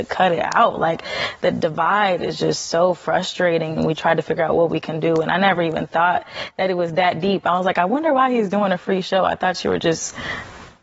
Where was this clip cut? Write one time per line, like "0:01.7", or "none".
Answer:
none